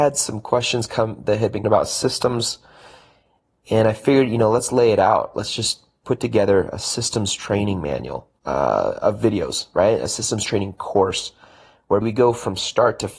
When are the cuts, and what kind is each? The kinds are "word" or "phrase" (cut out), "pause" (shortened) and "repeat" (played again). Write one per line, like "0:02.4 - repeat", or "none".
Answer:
0:01.6 - phrase
0:08.4 - pause
0:12.0 - word